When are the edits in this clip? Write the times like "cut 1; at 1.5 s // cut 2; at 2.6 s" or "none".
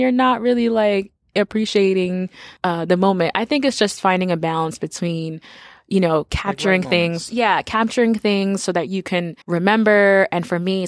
cut 1; at 2.6 s // cut 2; at 9.4 s